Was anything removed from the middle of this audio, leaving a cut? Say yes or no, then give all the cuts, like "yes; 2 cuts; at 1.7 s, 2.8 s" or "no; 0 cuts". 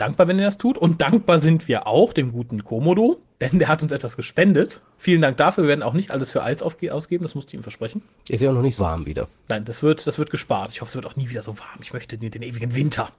yes; 1 cut; at 8.8 s